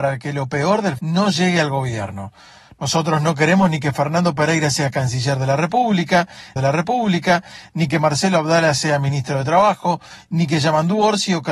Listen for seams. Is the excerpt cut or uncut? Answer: cut